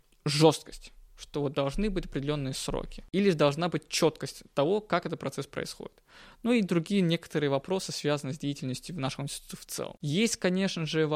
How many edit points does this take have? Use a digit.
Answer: 1